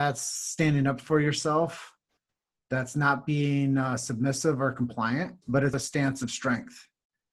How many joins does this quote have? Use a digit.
2